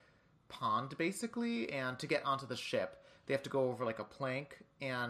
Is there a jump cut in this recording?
no; 0 cuts

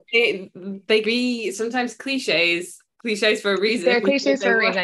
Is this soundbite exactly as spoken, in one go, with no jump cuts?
no; 3 cuts; at 1.0 s, 1.5 s, 3.0 s

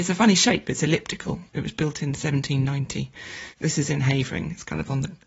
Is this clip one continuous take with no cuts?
yes; 0 cuts

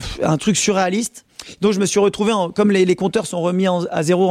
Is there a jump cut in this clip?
no; 0 cuts

